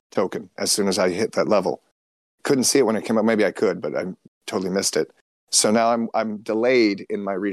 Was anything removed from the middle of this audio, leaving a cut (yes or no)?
no